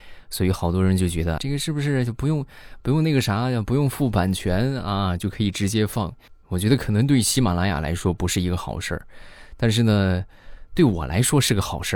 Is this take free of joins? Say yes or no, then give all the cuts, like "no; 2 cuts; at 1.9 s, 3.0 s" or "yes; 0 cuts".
no; 2 cuts; at 1.4 s, 6.4 s